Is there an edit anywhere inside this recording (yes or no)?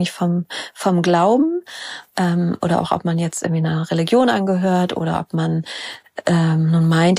no